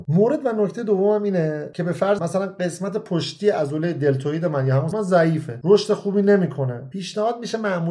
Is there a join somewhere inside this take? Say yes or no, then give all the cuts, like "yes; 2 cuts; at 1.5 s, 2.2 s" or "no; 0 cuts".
yes; 2 cuts; at 2.2 s, 4.9 s